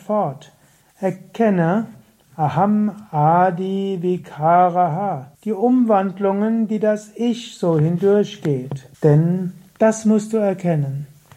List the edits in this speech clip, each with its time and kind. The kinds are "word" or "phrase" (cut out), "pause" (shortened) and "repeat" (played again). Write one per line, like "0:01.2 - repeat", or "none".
0:05.3 - pause
0:08.9 - pause